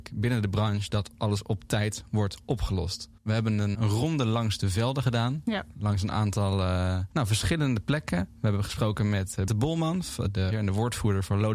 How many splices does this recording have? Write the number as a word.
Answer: five